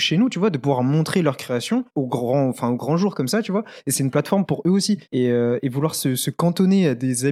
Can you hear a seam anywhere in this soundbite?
yes; 2 cuts; at 1.9 s, 5.1 s

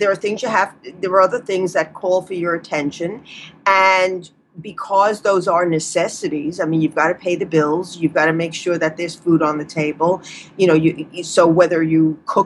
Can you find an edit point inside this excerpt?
no; 0 cuts

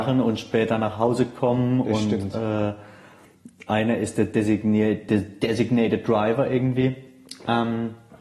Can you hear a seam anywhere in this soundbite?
no; 0 cuts

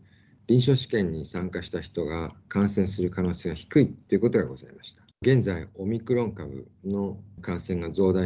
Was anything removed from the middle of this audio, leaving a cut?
yes; 1 cut; at 5.1 s

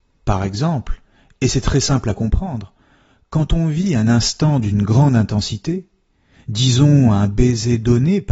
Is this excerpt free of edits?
yes; 0 cuts

